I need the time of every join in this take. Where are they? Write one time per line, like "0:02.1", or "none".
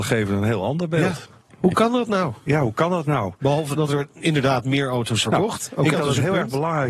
0:03.7
0:05.2
0:05.9